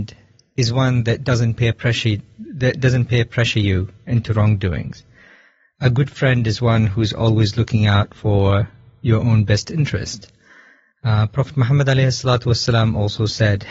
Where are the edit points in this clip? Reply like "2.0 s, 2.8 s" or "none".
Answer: none